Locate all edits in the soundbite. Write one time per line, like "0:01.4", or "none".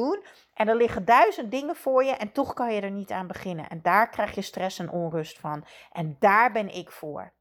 none